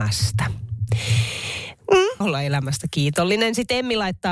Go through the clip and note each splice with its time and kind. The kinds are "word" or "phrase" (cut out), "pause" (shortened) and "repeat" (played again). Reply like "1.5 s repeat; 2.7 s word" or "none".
2.2 s phrase